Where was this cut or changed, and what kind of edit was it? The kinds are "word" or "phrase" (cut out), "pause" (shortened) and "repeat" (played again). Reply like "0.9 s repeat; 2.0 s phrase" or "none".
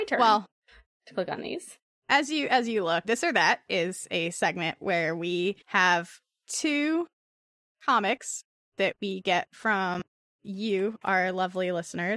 3.0 s word; 5.6 s pause